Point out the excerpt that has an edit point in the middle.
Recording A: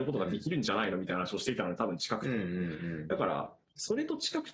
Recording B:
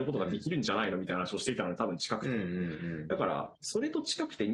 B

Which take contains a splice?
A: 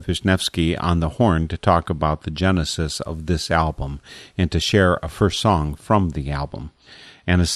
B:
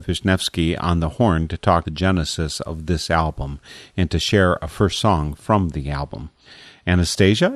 B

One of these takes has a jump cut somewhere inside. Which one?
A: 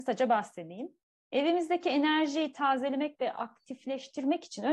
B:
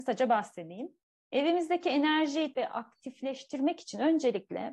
B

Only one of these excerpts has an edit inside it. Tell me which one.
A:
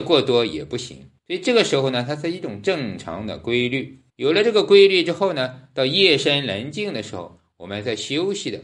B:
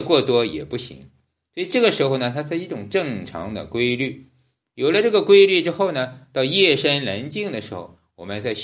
A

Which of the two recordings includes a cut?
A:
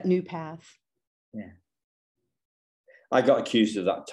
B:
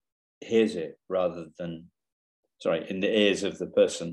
A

